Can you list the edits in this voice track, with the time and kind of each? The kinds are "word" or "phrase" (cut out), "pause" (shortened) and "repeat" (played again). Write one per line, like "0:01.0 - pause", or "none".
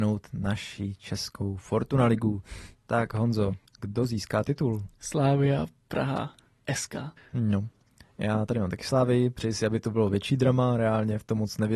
0:03.7 - pause
0:07.2 - pause

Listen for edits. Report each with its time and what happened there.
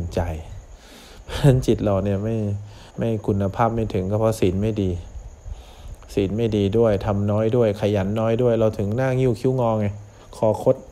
0:02.9 - pause

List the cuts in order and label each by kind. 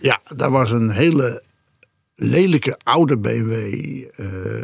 none

